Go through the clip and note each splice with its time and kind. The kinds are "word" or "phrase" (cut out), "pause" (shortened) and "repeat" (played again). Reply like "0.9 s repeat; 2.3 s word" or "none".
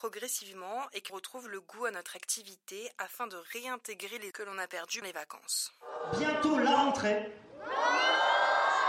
1.1 s word; 4.3 s word; 5.0 s word